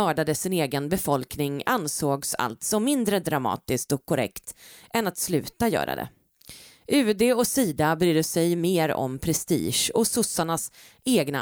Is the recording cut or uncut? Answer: uncut